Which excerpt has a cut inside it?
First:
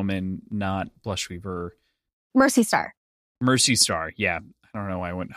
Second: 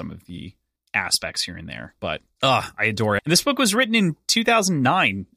second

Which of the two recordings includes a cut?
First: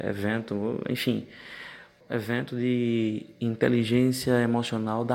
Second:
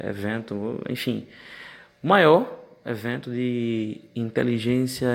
first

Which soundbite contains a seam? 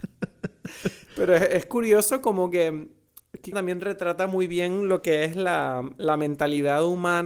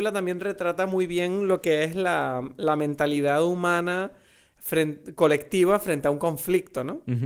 first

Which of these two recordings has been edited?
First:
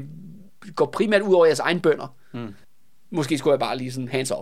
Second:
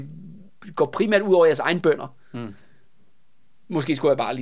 first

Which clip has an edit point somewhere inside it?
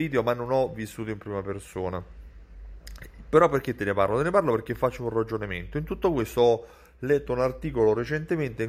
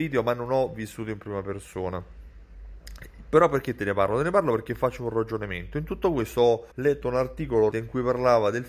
second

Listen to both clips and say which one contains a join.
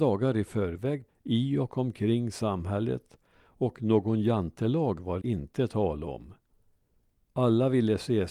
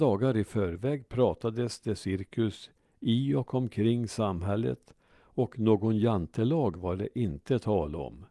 first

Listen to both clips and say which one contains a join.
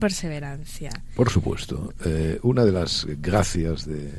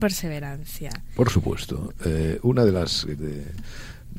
second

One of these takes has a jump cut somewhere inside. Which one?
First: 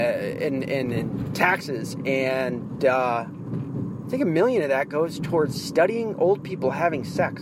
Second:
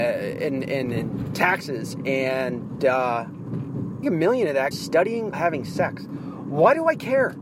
second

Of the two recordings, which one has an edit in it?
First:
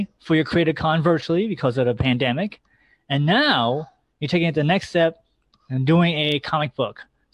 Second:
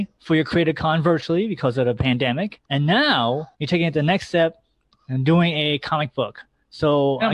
second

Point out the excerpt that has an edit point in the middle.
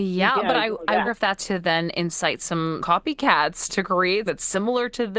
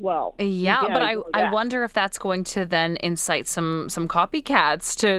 first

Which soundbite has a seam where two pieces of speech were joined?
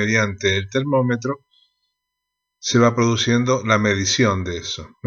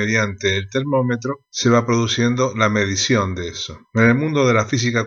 second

